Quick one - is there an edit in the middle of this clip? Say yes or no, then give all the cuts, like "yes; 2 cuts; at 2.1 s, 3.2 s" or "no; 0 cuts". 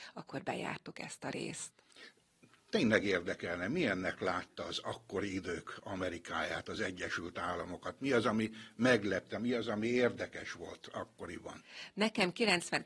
no; 0 cuts